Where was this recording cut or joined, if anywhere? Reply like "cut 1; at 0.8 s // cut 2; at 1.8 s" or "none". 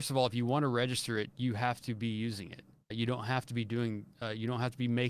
cut 1; at 2.9 s